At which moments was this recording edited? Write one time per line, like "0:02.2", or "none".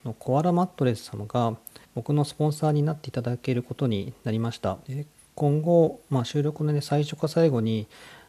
0:01.8
0:04.9